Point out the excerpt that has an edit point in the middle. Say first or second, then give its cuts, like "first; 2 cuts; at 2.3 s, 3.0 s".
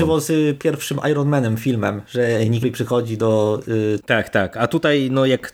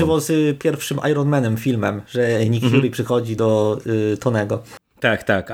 first; 2 cuts; at 2.6 s, 4.0 s